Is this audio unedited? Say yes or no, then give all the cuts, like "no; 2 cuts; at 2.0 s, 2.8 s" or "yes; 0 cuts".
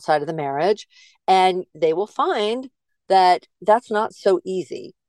yes; 0 cuts